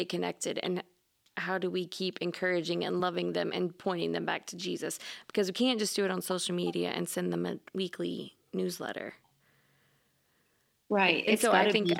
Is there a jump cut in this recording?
no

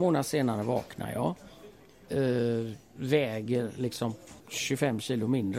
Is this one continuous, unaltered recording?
no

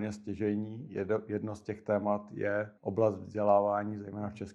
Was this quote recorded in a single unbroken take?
no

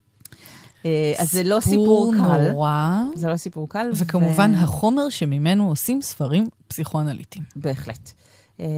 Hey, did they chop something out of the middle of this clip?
yes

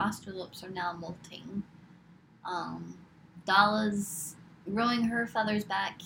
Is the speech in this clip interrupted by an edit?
no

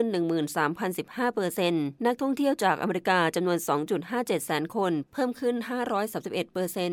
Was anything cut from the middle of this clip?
yes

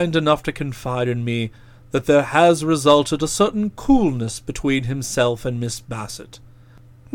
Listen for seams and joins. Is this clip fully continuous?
yes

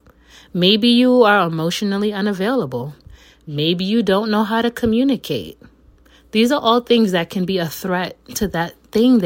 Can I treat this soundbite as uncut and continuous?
yes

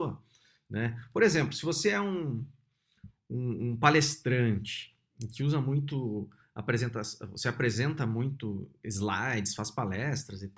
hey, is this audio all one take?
yes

